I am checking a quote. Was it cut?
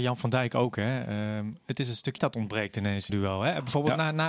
yes; 2 cuts; at 2.2 s, 3.1 s

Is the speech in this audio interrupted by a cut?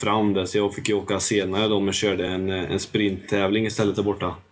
no; 0 cuts

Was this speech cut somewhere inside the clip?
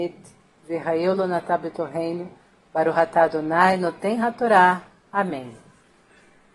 no; 0 cuts

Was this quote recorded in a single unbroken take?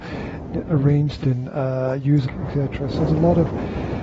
no; 3 cuts; at 1.2 s, 2.2 s, 3.1 s

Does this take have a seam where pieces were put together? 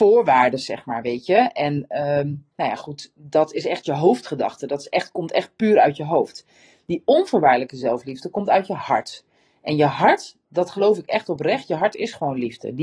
no; 0 cuts

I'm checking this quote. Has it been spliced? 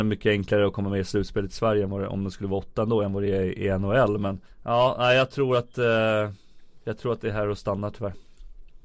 yes; 1 cut; at 4.5 s

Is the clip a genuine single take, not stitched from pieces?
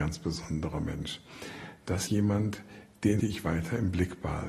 no; 2 cuts; at 2.1 s, 3.2 s

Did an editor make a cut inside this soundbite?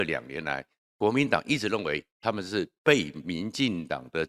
no; 0 cuts

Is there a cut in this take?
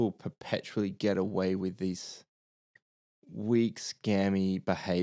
no; 0 cuts

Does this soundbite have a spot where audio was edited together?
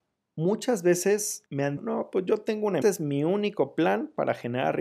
yes; 2 cuts; at 1.8 s, 2.8 s

